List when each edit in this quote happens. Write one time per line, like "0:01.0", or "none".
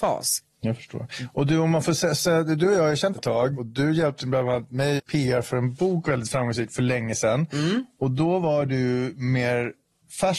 0:03.2
0:05.0